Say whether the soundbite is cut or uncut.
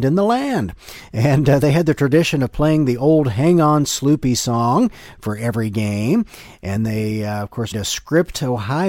cut